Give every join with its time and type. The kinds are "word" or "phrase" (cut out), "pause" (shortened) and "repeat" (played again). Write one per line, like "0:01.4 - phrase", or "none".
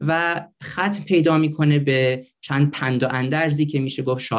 none